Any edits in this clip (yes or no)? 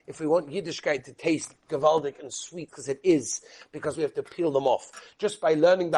yes